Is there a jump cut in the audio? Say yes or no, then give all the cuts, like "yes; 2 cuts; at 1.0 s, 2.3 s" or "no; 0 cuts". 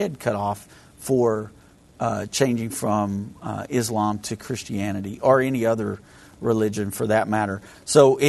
no; 0 cuts